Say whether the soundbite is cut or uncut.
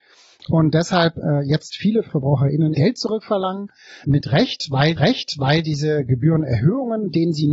cut